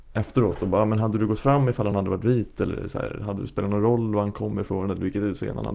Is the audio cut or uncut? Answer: uncut